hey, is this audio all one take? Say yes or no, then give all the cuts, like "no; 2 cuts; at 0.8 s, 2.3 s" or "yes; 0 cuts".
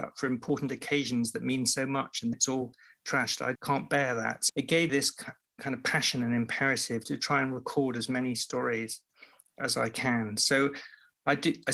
no; 4 cuts; at 2.3 s, 3.6 s, 4.5 s, 4.9 s